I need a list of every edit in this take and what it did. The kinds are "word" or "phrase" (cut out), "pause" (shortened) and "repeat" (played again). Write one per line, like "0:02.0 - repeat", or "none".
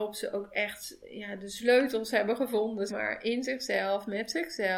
0:02.9 - word